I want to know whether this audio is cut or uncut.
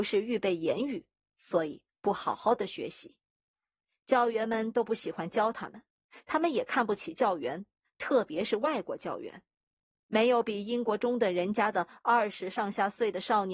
uncut